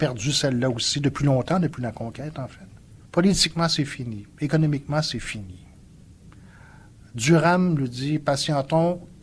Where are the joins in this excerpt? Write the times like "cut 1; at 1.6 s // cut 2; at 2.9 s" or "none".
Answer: cut 1; at 3.0 s